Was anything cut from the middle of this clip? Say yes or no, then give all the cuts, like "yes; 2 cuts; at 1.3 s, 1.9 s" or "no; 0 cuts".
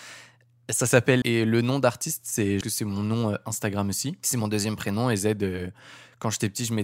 yes; 2 cuts; at 1.2 s, 2.6 s